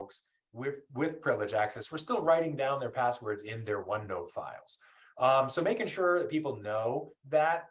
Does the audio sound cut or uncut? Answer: uncut